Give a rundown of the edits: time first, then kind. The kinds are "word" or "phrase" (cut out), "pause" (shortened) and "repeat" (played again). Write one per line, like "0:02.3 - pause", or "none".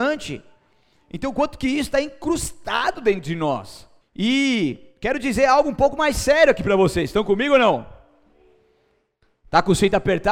0:04.0 - pause